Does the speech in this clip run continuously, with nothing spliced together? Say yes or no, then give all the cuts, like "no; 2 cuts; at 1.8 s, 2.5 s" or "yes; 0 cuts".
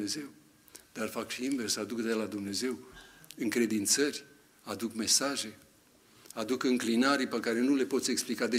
yes; 0 cuts